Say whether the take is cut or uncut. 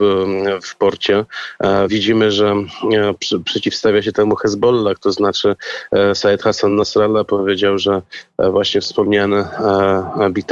uncut